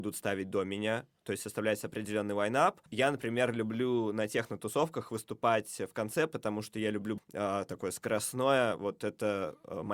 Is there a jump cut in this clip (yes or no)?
yes